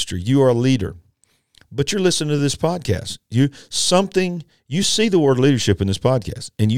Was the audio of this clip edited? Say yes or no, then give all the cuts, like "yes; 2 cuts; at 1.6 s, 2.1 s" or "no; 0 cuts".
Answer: no; 0 cuts